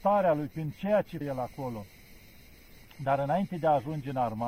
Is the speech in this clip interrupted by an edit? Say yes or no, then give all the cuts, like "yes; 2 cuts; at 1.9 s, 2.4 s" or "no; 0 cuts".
yes; 1 cut; at 1.2 s